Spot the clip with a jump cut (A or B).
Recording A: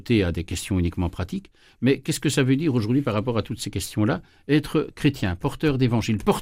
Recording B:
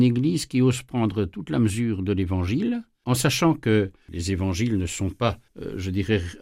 B